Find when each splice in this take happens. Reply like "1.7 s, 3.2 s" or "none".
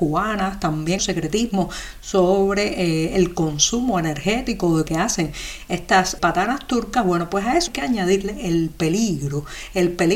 1.0 s, 4.9 s, 6.2 s, 7.7 s